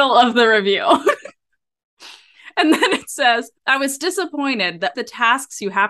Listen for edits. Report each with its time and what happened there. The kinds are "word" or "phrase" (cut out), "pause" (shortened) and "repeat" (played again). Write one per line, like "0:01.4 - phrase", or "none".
0:03.6 - pause
0:04.9 - phrase